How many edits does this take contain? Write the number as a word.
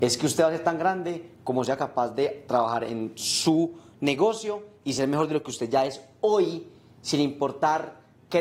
zero